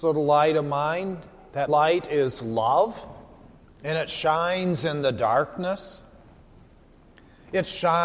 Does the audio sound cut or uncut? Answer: cut